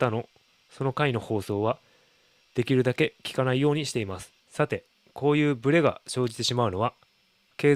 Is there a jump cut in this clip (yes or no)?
yes